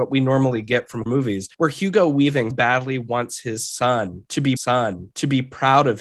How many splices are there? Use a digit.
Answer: 4